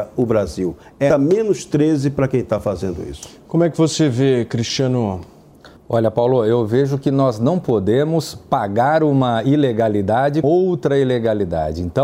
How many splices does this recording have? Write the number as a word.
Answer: three